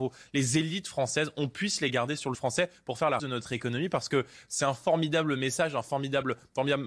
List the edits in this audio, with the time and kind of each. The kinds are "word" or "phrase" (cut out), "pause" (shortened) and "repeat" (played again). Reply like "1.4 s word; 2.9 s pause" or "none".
2.3 s word; 3.2 s word